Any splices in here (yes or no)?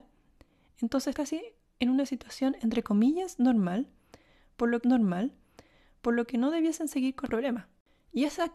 yes